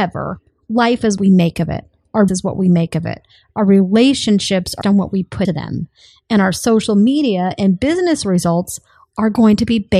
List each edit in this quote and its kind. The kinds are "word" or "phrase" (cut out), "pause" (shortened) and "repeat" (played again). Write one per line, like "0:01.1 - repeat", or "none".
0:01.2 - word
0:02.3 - word
0:04.8 - word
0:05.4 - word